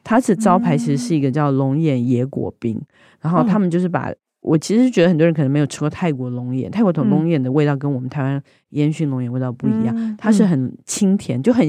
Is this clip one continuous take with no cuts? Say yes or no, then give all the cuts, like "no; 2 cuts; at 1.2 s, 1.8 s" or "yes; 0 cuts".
yes; 0 cuts